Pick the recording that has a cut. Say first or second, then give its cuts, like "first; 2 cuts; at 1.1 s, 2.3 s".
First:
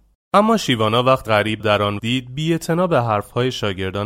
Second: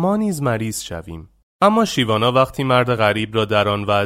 first; 3 cuts; at 1.3 s, 1.6 s, 2.0 s